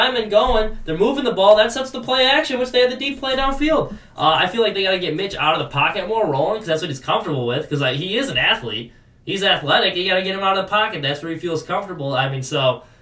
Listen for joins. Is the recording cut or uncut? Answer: uncut